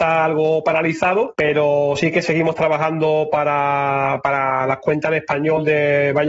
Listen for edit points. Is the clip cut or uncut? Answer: uncut